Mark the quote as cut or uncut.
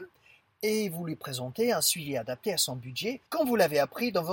cut